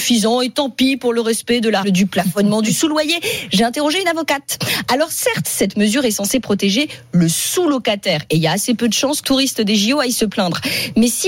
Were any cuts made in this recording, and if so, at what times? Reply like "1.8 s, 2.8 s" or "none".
1.8 s, 9.2 s